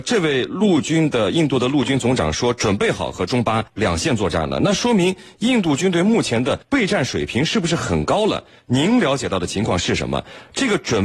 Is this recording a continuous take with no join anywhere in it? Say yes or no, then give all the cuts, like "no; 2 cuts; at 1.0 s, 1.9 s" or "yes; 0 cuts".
no; 2 cuts; at 3.7 s, 6.6 s